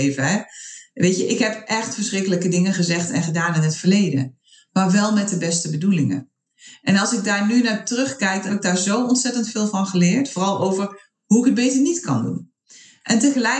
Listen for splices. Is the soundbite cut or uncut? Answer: cut